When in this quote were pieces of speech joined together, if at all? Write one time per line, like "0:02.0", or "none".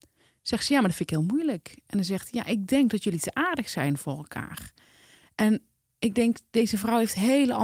0:05.8